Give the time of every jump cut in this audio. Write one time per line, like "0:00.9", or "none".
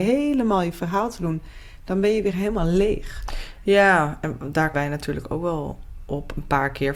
0:04.7